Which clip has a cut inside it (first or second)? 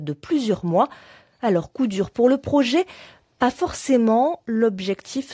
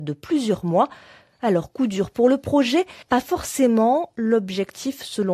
second